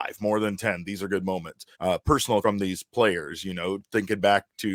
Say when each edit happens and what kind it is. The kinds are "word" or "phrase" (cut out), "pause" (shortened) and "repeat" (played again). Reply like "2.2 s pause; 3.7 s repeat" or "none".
1.7 s pause; 2.4 s word

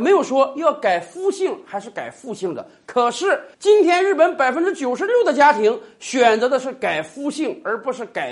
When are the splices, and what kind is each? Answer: 3.5 s pause

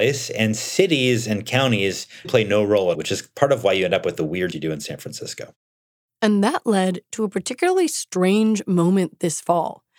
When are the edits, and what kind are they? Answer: 2.2 s word; 2.9 s word; 4.5 s word

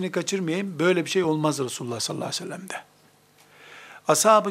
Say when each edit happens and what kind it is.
none

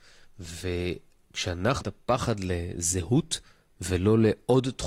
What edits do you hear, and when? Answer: 1.8 s word

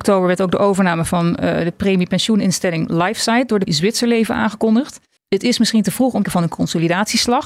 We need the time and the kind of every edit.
3.7 s word; 5.2 s pause; 6.2 s phrase

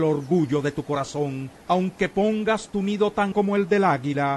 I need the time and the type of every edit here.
1.6 s pause; 3.3 s word

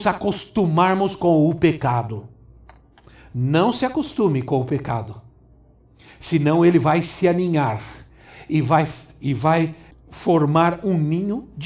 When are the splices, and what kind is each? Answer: 9.9 s pause

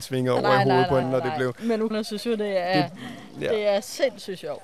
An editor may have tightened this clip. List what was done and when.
1.0 s word; 1.9 s word

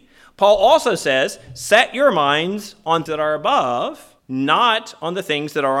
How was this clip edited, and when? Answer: 3.1 s word; 4.2 s pause

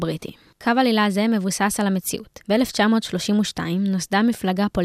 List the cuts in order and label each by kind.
2.4 s pause

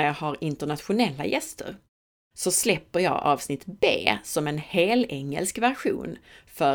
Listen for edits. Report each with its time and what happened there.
none

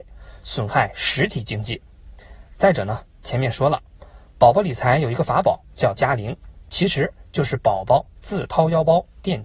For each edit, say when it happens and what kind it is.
6.0 s word

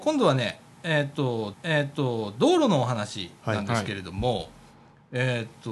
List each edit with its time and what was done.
1.5 s repeat

